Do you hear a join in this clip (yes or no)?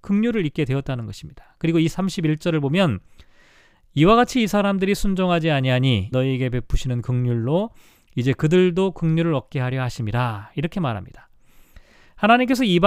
yes